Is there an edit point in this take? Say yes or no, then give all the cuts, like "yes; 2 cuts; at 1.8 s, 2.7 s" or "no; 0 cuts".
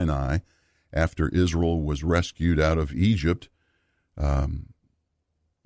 no; 0 cuts